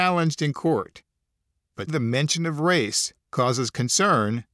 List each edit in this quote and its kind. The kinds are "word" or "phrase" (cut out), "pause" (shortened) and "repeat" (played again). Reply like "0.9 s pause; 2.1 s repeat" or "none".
1.9 s word; 3.2 s pause